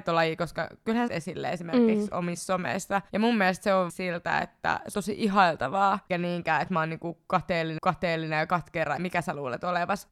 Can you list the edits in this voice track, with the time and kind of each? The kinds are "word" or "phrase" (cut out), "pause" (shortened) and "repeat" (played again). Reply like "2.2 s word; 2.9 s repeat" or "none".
1.1 s phrase; 3.9 s phrase; 4.9 s word; 6.1 s word; 7.8 s repeat; 9.0 s word